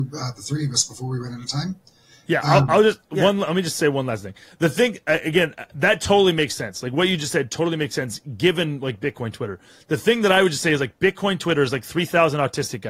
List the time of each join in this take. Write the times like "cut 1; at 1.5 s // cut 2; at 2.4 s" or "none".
none